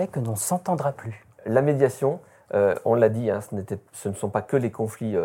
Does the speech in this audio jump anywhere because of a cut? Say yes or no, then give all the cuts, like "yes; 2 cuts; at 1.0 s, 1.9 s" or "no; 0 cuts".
no; 0 cuts